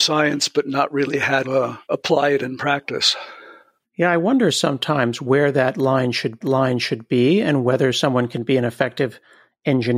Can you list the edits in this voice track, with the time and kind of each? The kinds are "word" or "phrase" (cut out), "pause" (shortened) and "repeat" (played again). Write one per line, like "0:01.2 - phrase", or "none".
0:01.4 - word
0:01.8 - pause
0:06.4 - repeat

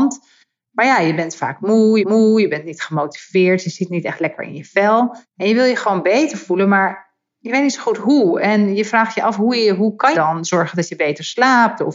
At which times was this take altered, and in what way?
0:02.0 - repeat
0:05.2 - pause
0:10.1 - word

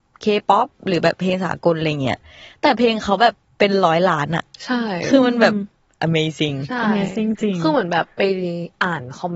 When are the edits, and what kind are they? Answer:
none

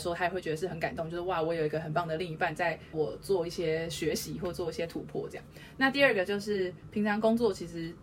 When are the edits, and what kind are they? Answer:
0:02.9 - word

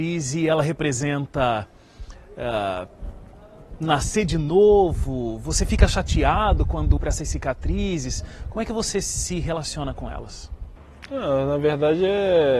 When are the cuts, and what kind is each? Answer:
0:07.0 - word

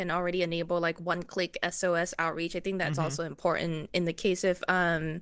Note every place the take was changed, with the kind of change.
none

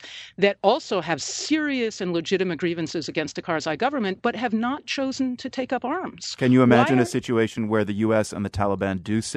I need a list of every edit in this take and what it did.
none

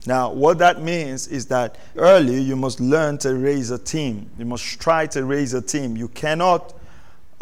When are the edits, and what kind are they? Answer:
0:02.0 - word

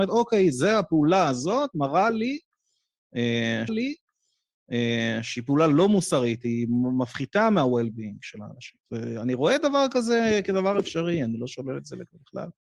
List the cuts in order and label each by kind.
0:03.7 - repeat
0:08.8 - pause

